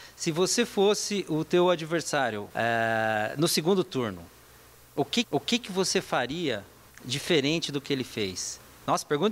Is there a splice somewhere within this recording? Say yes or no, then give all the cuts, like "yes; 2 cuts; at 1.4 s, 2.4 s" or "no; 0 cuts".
yes; 3 cuts; at 2.5 s, 5.2 s, 6.9 s